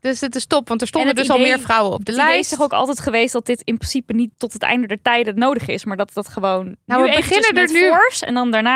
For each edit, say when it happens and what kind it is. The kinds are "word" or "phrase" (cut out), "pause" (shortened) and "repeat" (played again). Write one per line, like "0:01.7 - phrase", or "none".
0:04.3 - pause